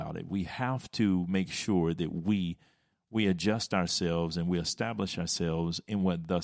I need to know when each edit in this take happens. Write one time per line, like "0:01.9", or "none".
none